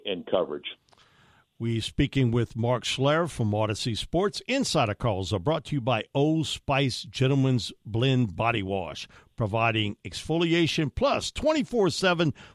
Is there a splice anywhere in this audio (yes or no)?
no